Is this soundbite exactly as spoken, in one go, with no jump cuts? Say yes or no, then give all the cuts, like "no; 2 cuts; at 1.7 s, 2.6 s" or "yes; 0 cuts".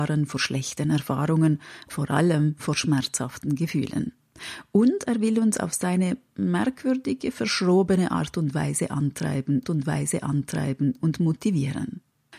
no; 2 cuts; at 1.9 s, 9.6 s